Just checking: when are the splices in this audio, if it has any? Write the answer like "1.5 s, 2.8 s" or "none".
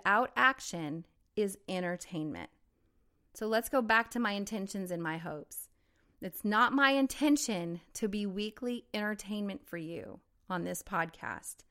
none